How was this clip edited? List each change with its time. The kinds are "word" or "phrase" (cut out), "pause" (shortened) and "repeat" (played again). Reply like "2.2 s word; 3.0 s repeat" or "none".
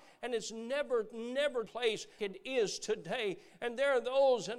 1.7 s word; 2.2 s word